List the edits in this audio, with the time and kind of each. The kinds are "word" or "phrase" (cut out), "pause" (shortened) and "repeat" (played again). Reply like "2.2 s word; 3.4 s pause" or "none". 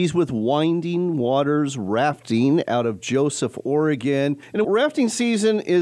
4.6 s word